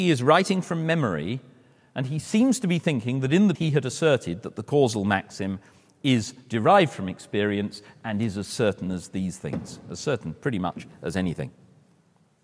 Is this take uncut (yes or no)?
no